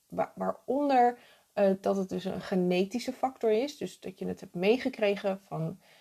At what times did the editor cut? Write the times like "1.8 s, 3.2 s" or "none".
none